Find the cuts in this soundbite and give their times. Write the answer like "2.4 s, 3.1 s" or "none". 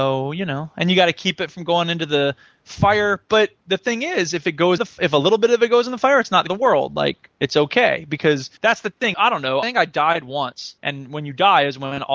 4.8 s, 6.5 s, 7.3 s, 8.6 s, 9.1 s, 9.6 s, 10.8 s